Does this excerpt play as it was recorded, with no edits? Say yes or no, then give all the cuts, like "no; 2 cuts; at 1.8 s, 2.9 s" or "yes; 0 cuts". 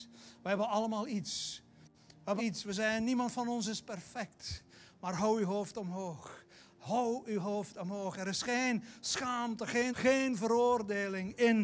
no; 2 cuts; at 2.4 s, 9.9 s